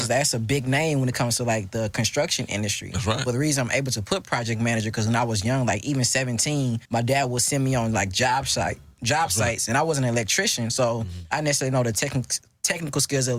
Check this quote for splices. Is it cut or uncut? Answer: cut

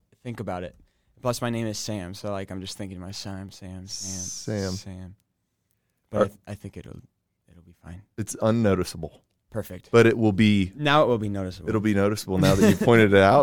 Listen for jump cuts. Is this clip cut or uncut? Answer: uncut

